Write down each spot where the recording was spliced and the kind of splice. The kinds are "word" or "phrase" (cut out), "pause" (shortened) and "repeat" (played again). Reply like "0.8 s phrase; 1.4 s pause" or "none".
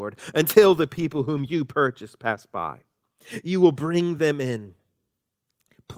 none